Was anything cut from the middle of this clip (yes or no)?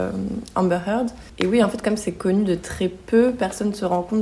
no